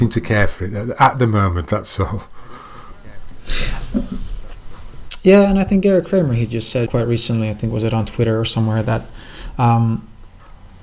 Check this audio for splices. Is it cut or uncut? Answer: cut